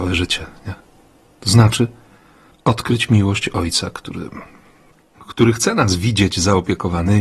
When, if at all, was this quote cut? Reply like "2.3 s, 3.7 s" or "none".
none